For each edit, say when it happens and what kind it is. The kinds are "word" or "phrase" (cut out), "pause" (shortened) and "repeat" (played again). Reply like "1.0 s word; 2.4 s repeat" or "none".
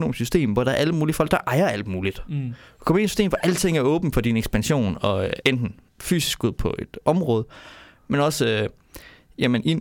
5.4 s word; 5.9 s pause